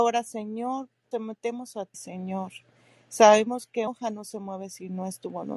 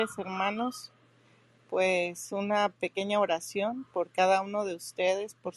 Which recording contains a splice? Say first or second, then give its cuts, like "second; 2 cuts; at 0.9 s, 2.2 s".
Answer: first; 3 cuts; at 1.1 s, 1.9 s, 3.9 s